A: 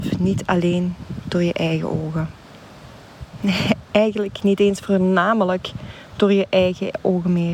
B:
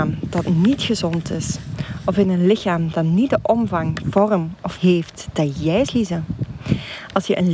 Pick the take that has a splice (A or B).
B